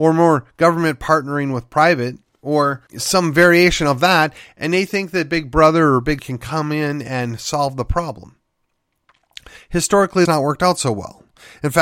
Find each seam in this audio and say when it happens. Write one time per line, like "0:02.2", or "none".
0:02.9
0:06.2
0:10.3